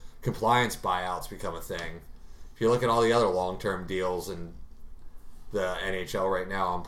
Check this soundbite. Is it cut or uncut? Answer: uncut